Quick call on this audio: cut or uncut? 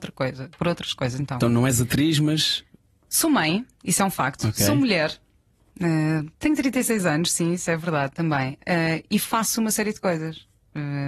uncut